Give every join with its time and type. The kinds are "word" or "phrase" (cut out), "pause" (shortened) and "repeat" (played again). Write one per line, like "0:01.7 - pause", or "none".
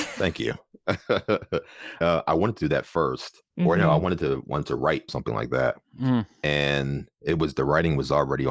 0:02.0 - word
0:03.5 - pause
0:05.1 - phrase